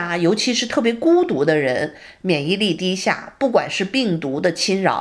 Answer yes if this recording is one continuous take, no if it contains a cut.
yes